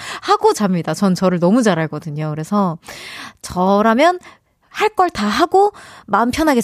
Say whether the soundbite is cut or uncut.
uncut